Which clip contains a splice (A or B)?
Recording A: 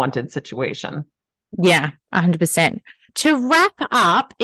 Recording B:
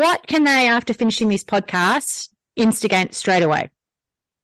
A